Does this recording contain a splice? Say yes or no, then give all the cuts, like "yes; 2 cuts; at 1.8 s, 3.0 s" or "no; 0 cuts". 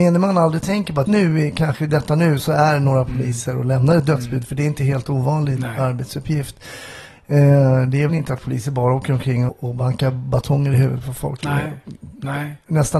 yes; 3 cuts; at 1.1 s, 8.1 s, 9.5 s